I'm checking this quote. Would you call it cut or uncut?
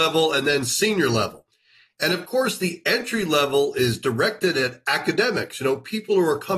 uncut